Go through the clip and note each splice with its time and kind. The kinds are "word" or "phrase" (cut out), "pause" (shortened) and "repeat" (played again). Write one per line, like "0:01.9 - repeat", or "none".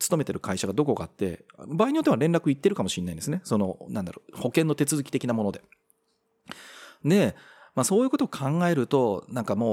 none